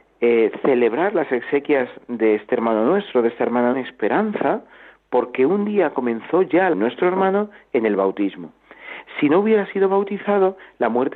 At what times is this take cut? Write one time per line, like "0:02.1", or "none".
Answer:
0:03.7
0:06.7